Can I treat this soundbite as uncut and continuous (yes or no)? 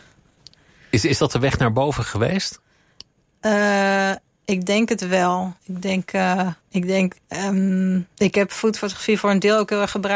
no